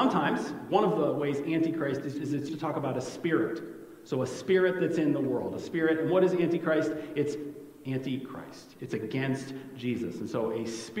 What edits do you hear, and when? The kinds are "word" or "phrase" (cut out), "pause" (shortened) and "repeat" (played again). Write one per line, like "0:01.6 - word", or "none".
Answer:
0:02.1 - word
0:02.5 - word